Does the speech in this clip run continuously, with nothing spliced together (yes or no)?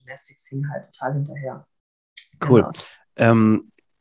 yes